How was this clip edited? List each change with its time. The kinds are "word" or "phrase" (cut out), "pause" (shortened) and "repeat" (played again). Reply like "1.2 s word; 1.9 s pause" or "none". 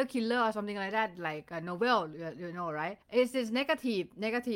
3.0 s pause